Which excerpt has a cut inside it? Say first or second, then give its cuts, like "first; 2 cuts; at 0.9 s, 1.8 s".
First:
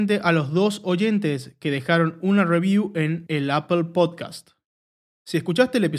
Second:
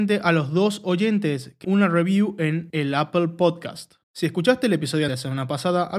second; 3 cuts; at 1.6 s, 4.0 s, 5.1 s